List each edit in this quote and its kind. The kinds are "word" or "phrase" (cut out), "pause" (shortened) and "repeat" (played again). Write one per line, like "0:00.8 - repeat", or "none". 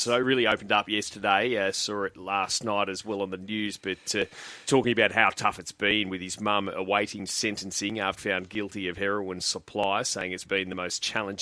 0:04.7 - word
0:08.2 - word
0:10.4 - word